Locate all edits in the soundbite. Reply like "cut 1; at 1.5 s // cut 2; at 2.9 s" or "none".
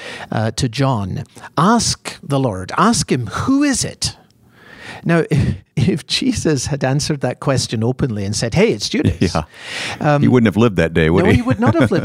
cut 1; at 5.7 s